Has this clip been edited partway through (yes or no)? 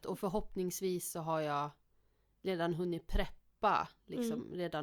no